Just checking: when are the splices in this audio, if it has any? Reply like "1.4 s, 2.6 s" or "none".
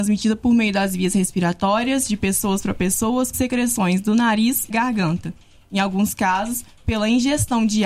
3.3 s, 4.7 s